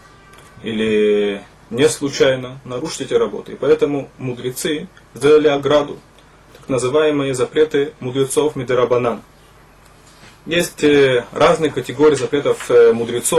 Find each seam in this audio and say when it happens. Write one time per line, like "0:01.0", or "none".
none